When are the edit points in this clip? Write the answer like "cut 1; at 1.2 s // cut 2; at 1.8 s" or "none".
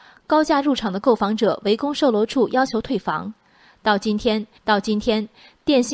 cut 1; at 4.6 s